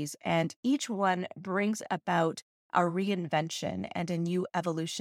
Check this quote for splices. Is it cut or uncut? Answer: uncut